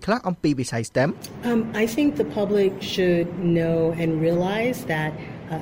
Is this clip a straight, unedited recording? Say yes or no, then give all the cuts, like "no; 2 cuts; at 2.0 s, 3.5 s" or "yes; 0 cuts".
yes; 0 cuts